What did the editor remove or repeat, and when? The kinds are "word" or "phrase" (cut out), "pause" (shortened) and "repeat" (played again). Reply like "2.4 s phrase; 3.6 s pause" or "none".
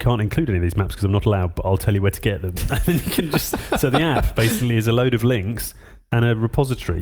none